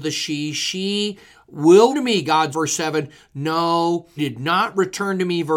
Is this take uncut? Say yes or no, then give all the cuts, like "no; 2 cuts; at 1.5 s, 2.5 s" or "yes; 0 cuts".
no; 3 cuts; at 1.9 s, 2.5 s, 4.2 s